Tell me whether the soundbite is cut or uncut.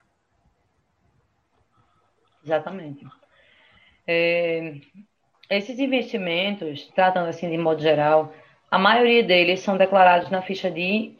cut